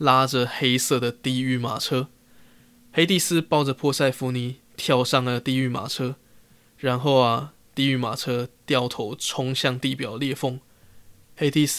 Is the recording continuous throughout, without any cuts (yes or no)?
yes